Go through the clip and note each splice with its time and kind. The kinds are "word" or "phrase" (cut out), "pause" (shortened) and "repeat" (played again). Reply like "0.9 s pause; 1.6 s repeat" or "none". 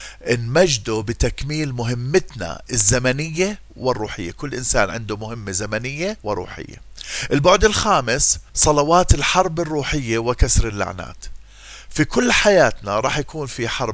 3.7 s pause; 6.2 s pause; 8.5 s pause